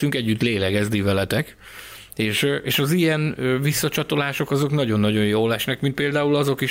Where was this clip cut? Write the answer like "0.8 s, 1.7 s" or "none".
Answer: none